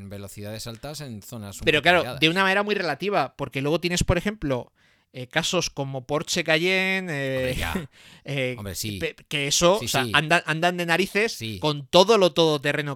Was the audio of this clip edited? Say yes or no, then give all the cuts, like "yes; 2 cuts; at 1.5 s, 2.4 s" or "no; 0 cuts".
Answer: no; 0 cuts